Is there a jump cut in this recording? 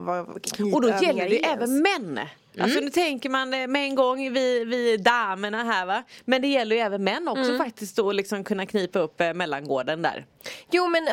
no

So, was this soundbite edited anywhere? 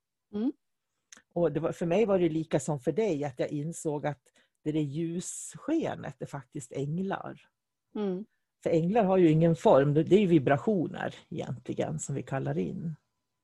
no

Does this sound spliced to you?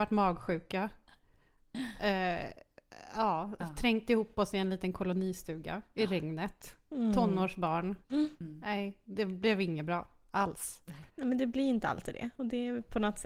yes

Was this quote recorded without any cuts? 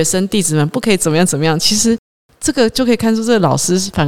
yes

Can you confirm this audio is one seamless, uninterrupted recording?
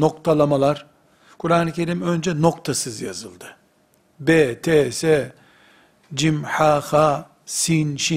yes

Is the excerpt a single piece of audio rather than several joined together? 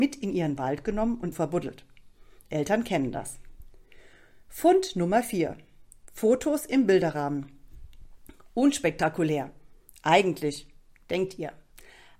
no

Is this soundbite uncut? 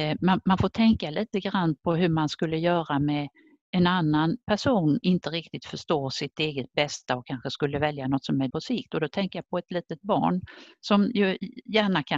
no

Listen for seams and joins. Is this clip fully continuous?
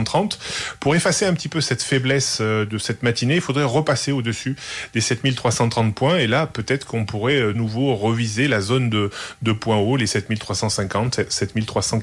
no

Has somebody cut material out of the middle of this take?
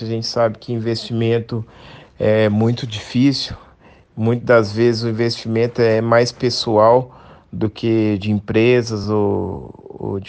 no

